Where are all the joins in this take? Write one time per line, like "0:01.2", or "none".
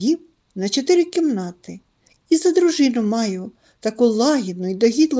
none